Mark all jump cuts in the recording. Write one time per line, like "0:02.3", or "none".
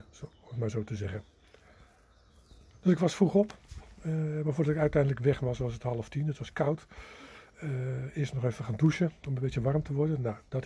none